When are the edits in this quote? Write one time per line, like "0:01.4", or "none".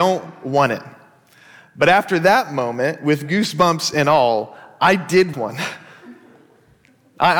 0:05.3